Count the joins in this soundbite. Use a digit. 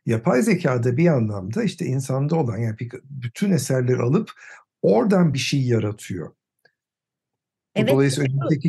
0